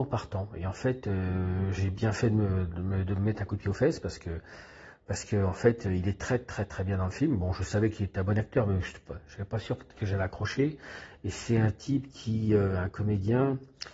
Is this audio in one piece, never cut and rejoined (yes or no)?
yes